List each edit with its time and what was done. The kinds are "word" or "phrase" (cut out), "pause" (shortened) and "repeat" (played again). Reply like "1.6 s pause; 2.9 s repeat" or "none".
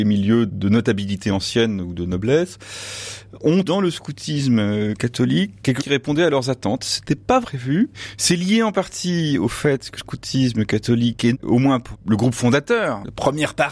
3.6 s word; 5.8 s word; 7.4 s word; 10.0 s word; 11.3 s word; 11.9 s word